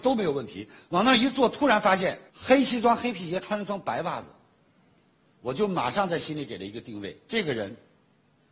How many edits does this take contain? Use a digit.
1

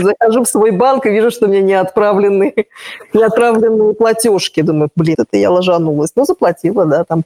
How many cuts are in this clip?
1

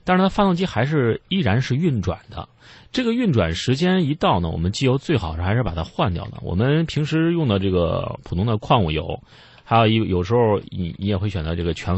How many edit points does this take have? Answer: 0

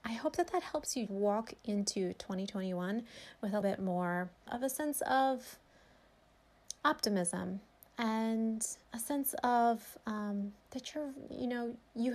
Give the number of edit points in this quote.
6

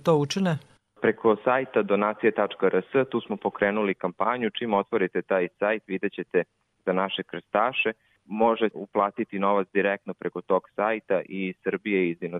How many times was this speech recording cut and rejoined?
1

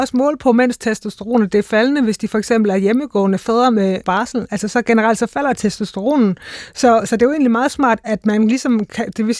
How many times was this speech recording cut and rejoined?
2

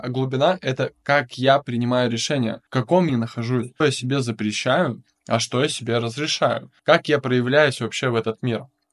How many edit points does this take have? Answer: 4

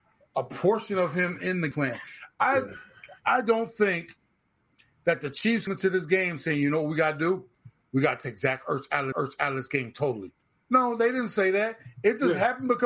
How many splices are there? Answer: 3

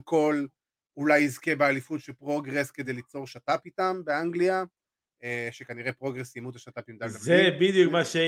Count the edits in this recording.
0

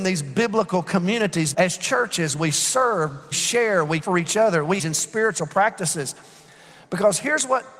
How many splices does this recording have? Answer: 4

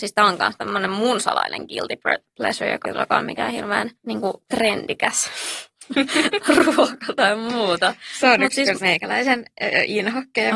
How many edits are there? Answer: 2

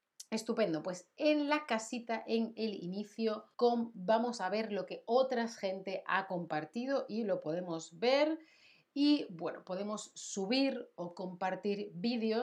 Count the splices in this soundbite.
1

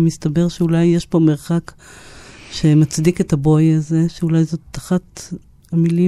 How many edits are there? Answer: 0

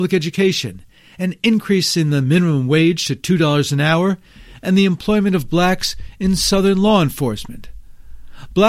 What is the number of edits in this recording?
0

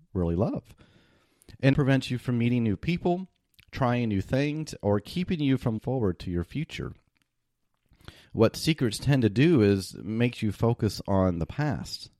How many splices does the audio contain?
2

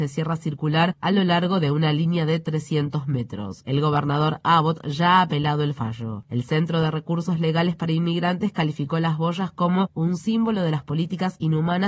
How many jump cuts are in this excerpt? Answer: 0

